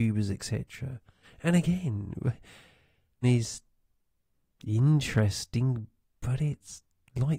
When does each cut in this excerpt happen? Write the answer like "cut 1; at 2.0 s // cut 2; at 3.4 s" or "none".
cut 1; at 1.2 s // cut 2; at 3.2 s